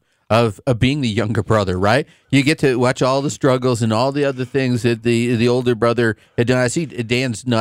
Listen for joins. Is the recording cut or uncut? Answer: uncut